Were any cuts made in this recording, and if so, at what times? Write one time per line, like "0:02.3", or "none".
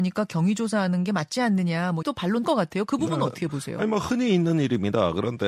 0:02.0
0:02.4